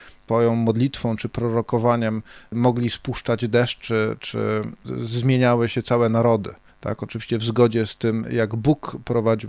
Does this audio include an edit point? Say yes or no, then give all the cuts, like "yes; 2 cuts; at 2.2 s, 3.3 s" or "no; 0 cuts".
no; 0 cuts